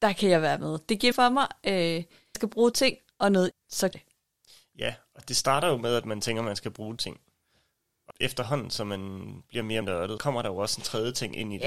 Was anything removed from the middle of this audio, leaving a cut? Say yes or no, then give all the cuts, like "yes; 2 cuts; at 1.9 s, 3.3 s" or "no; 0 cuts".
yes; 9 cuts; at 1.1 s, 2.3 s, 2.7 s, 3.5 s, 3.9 s, 7.0 s, 8.1 s, 9.8 s, 10.2 s